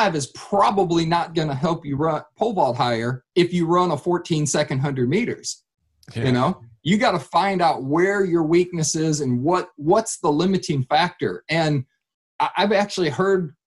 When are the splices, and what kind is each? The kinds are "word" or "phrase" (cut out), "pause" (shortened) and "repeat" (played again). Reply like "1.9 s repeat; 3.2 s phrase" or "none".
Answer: 3.3 s pause